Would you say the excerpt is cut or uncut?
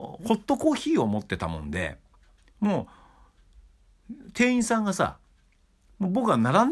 uncut